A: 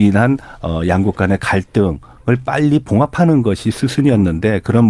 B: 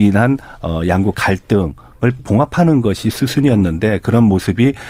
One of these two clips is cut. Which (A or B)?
B